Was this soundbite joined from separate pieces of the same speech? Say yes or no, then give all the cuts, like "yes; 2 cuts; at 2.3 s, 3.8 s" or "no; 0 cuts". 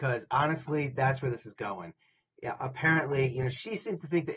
no; 0 cuts